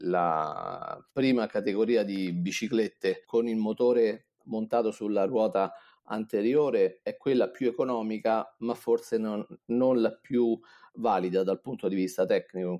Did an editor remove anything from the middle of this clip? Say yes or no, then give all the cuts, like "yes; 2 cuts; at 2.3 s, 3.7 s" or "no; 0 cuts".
no; 0 cuts